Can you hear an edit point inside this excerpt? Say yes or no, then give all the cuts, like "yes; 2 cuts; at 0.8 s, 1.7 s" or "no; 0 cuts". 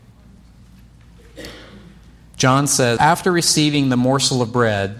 yes; 1 cut; at 3.0 s